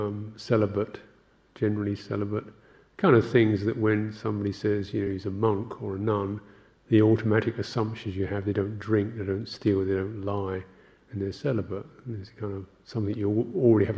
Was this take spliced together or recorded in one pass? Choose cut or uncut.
uncut